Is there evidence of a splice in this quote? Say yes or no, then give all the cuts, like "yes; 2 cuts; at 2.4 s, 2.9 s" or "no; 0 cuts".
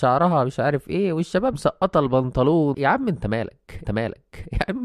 yes; 3 cuts; at 1.5 s, 2.7 s, 3.8 s